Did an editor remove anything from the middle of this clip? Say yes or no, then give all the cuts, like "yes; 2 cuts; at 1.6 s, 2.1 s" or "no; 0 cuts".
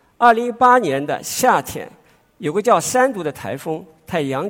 no; 0 cuts